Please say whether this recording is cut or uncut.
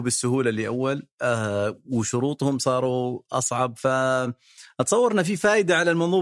uncut